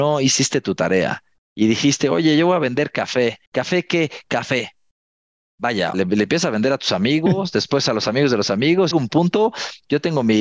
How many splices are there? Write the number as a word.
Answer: three